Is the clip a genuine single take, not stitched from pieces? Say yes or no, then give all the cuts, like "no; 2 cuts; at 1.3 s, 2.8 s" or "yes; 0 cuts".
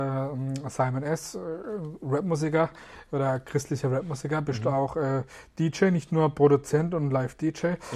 yes; 0 cuts